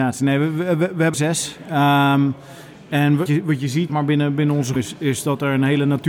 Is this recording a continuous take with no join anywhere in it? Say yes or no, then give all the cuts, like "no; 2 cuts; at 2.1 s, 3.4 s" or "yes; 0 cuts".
no; 4 cuts; at 1.1 s, 3.3 s, 3.9 s, 4.8 s